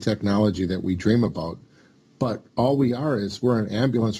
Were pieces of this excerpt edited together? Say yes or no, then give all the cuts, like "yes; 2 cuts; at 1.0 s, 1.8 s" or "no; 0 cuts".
no; 0 cuts